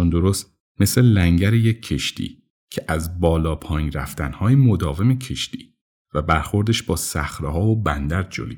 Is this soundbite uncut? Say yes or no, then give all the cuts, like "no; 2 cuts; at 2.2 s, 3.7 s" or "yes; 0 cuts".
yes; 0 cuts